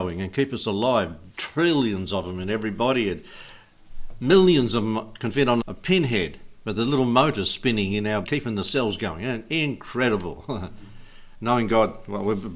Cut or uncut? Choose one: cut